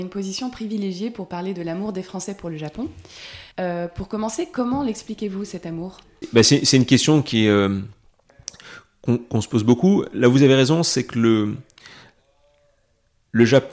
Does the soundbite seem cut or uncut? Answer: cut